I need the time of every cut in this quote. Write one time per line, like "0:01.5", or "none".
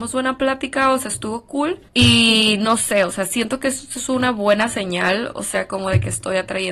0:01.9